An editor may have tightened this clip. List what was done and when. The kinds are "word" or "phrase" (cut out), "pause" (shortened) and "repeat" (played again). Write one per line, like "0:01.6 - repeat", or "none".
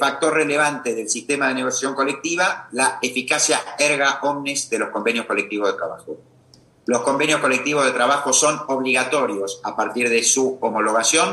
none